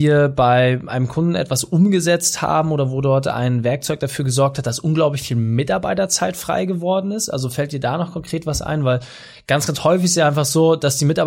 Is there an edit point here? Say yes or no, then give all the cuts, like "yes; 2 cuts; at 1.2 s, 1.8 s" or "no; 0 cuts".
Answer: no; 0 cuts